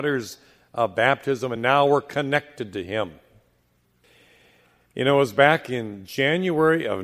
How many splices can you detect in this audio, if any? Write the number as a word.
zero